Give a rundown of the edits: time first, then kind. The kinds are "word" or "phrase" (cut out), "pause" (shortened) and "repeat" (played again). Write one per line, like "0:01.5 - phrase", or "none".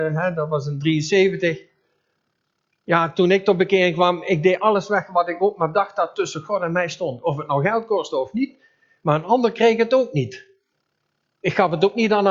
none